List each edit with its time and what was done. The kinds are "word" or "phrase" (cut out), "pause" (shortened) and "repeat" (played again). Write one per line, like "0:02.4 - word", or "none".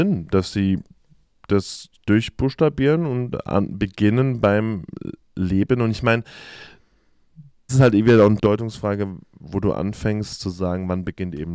0:07.7 - word
0:08.4 - word